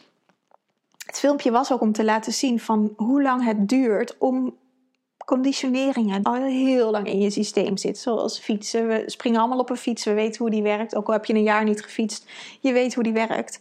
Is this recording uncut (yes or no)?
no